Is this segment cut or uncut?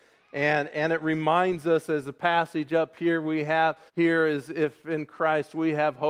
cut